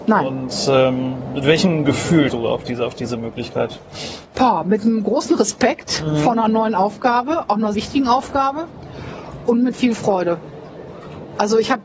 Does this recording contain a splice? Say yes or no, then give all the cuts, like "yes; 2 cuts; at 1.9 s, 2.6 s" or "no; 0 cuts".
yes; 4 cuts; at 2.3 s, 4.3 s, 7.7 s, 9.7 s